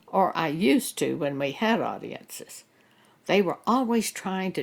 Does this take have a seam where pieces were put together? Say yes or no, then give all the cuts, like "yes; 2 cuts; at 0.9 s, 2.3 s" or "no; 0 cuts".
no; 0 cuts